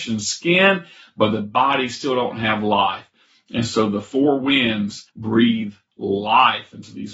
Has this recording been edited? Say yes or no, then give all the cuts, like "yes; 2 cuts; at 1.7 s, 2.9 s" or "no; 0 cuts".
yes; 1 cut; at 5.1 s